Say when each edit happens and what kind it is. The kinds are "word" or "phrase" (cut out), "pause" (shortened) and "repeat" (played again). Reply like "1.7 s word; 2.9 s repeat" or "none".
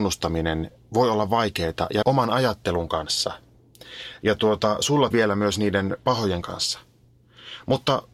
2.0 s word; 5.1 s word; 6.4 s word